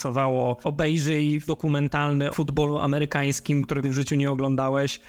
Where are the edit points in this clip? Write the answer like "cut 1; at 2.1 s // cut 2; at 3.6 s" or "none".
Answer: cut 1; at 1.5 s // cut 2; at 2.3 s // cut 3; at 3.8 s